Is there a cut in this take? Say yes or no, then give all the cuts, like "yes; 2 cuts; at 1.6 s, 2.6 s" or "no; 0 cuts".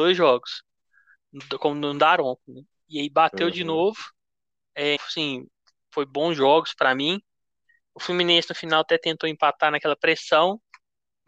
yes; 1 cut; at 5.0 s